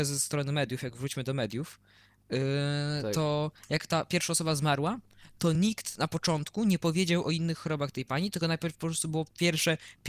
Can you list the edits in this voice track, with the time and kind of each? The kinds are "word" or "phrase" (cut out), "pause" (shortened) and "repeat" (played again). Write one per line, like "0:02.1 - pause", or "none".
none